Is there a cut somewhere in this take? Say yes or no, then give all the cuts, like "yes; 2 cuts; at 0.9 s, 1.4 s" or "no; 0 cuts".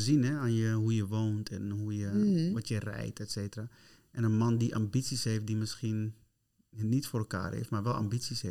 no; 0 cuts